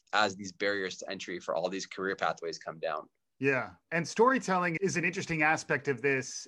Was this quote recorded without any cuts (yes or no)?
no